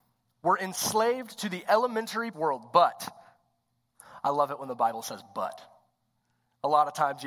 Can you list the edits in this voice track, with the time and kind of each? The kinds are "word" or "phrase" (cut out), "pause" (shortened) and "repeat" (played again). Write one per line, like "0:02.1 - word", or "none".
0:02.3 - phrase